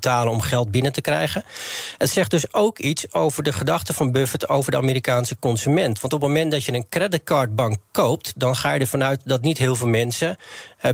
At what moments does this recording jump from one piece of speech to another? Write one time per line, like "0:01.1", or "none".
none